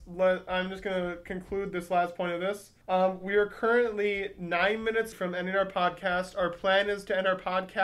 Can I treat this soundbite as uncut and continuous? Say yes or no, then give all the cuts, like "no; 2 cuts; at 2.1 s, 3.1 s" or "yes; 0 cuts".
no; 2 cuts; at 2.8 s, 5.1 s